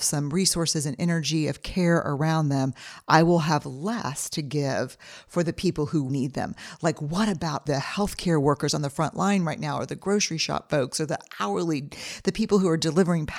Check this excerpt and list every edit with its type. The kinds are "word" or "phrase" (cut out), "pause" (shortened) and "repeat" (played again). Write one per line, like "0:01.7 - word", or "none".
0:06.1 - word